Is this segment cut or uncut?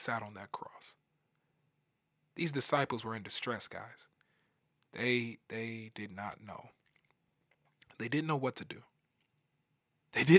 uncut